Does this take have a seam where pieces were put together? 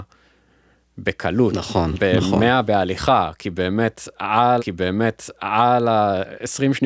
yes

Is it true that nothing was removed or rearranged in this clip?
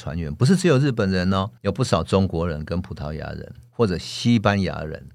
no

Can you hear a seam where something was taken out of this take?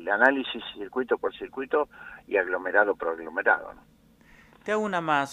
no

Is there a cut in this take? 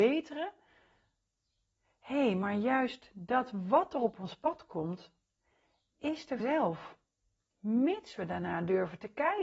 yes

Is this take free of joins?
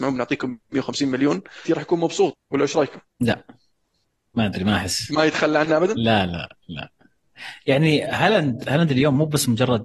no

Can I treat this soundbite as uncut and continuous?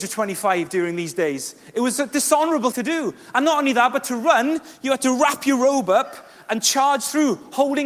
no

